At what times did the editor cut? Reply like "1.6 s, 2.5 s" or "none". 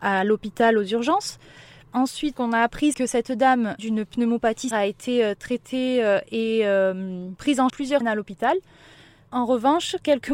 2.3 s, 2.9 s, 3.8 s, 4.7 s, 7.7 s, 8.0 s